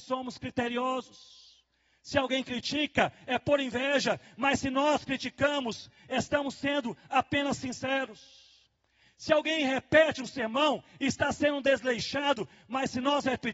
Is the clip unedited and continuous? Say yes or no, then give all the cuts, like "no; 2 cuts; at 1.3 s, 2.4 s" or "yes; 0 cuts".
yes; 0 cuts